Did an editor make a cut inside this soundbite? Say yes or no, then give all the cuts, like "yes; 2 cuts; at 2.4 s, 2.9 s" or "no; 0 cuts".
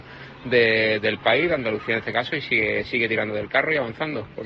no; 0 cuts